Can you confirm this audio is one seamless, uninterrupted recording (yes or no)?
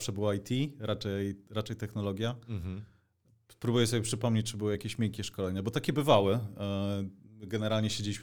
yes